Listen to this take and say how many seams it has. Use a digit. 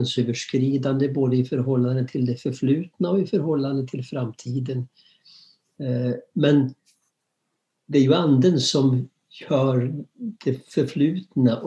0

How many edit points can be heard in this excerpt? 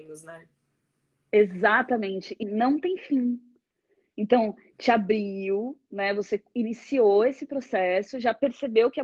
1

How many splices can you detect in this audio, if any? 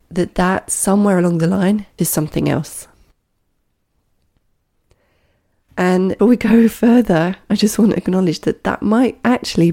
2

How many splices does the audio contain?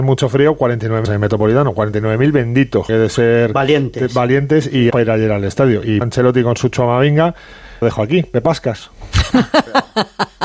5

